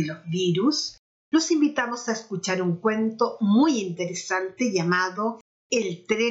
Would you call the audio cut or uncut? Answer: uncut